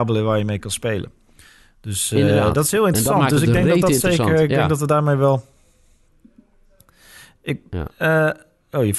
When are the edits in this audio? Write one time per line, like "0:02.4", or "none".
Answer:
none